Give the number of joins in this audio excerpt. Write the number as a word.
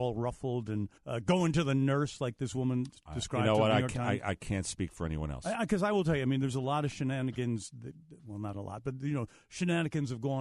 one